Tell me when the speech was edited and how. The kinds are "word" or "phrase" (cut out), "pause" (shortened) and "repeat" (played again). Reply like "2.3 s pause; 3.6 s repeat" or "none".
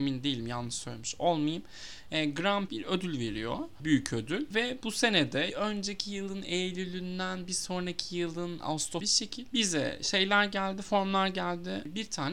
2.7 s phrase; 5.5 s phrase; 9.0 s phrase